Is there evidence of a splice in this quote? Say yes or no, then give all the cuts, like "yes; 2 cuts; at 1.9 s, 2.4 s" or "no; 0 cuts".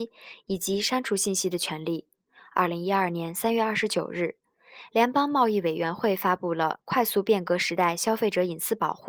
yes; 1 cut; at 2.3 s